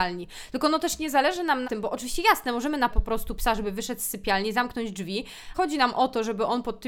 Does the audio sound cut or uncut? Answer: cut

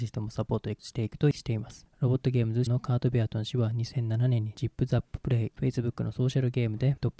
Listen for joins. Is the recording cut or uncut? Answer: cut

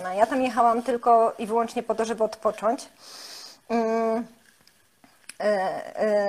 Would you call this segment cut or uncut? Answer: uncut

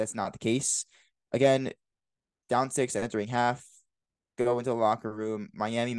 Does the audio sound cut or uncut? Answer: uncut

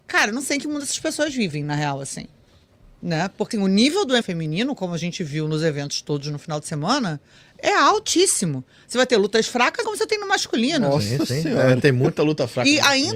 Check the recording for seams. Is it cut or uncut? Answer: cut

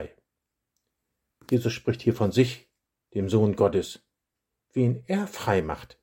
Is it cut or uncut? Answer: uncut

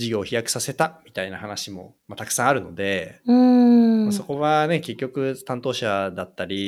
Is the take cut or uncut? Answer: cut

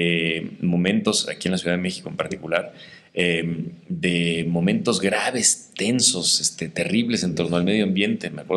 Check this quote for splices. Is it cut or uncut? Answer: uncut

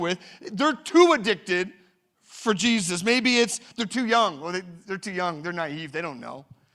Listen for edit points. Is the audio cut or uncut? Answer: uncut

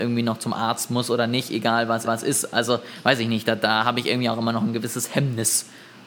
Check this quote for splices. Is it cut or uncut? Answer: cut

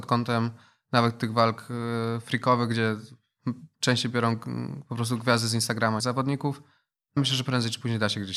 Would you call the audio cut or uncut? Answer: cut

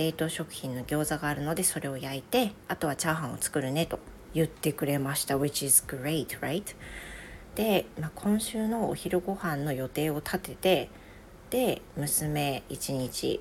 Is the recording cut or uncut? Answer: uncut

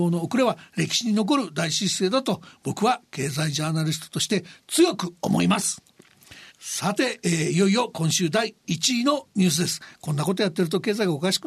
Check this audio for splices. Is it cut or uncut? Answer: cut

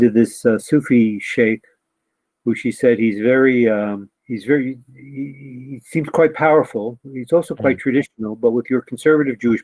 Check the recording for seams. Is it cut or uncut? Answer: cut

